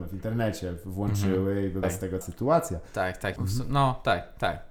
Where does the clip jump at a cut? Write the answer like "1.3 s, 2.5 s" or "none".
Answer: 1.8 s, 2.2 s, 3.4 s